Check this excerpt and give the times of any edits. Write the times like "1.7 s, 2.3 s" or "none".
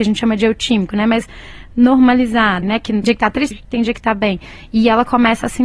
2.6 s, 3.0 s, 3.5 s

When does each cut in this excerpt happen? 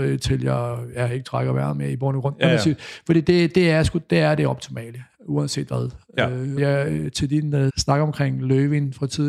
6.6 s, 7.7 s

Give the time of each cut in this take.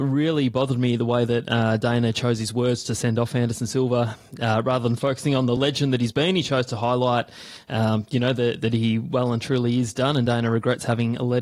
none

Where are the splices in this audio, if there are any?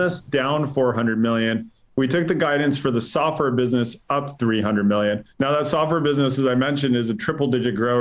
5.3 s

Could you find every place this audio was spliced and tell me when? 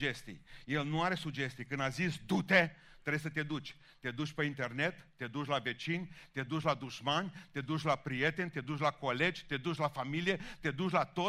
none

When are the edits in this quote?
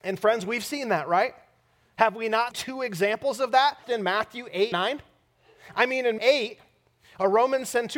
2.5 s, 3.8 s, 4.7 s, 6.2 s

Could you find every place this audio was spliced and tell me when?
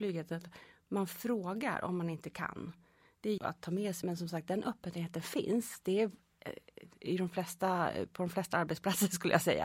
3.4 s, 4.0 s

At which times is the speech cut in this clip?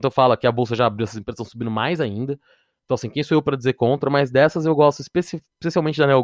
none

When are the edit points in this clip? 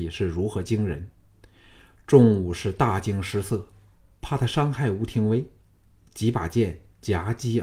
none

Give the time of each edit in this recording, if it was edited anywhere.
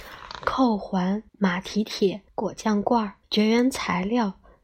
1.3 s, 2.3 s, 3.2 s

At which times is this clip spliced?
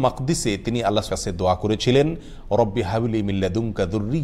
1.1 s

